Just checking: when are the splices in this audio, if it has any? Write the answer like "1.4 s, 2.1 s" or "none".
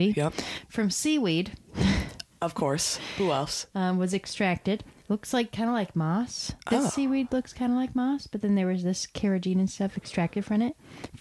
none

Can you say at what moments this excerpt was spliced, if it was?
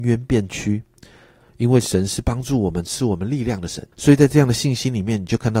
3.9 s

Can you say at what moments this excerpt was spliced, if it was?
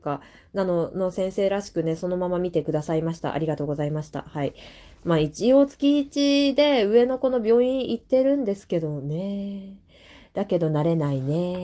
none

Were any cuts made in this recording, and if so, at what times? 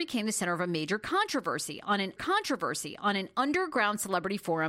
2.2 s

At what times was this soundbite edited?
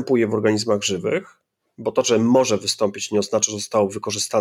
1.6 s

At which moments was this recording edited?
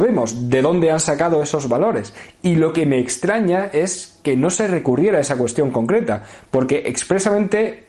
none

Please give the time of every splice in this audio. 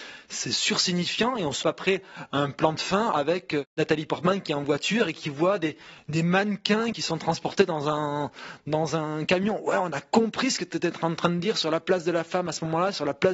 1.6 s

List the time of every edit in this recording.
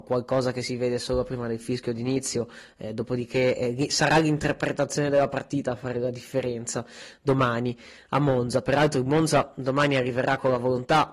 none

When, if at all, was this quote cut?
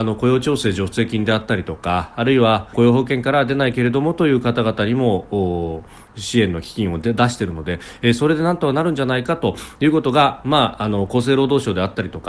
2.7 s

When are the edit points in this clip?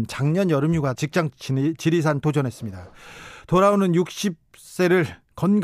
1.0 s, 1.3 s, 2.2 s

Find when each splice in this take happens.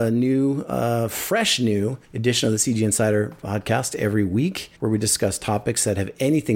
2.0 s, 4.7 s

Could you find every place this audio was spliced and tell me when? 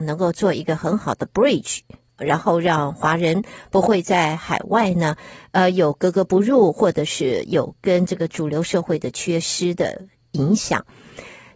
none

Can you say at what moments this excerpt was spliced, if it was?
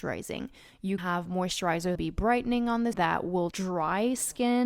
1.0 s, 2.0 s, 2.9 s, 3.5 s

